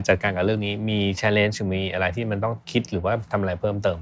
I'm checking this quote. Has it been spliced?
yes; 1 cut; at 2.6 s

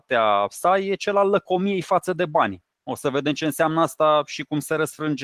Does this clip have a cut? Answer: yes; 1 cut; at 2.7 s

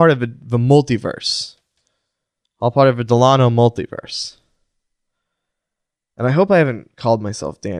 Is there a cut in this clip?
no; 0 cuts

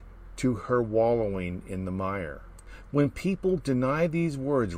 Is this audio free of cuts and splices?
yes; 0 cuts

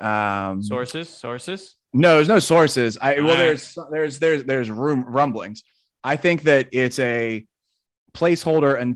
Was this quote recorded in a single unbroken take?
yes; 0 cuts

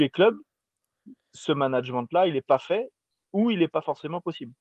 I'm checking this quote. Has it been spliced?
no; 0 cuts

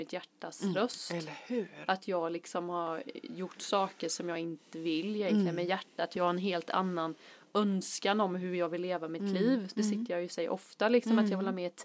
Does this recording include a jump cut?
no; 0 cuts

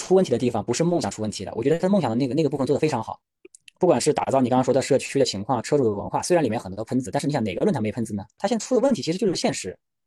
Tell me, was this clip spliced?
no; 0 cuts

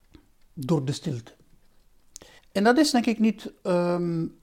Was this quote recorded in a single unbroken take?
no; 1 cut; at 2.4 s

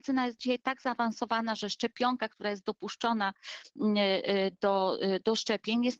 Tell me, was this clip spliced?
no; 0 cuts

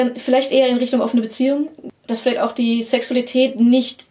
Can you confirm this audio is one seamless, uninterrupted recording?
yes; 0 cuts

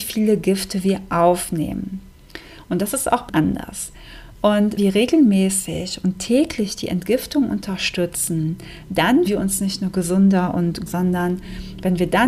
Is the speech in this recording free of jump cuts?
no; 4 cuts; at 3.3 s, 4.8 s, 9.3 s, 10.9 s

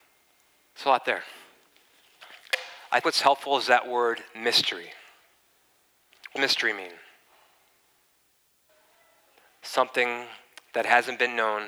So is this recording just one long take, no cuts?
no; 2 cuts; at 3.0 s, 6.4 s

